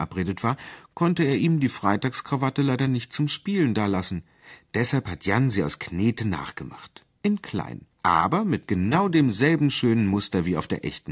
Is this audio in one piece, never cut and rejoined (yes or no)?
no